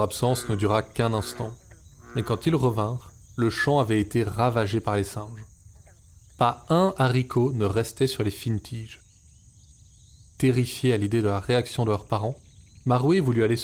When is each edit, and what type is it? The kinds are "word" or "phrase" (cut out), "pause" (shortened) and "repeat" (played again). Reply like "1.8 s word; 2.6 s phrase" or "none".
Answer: none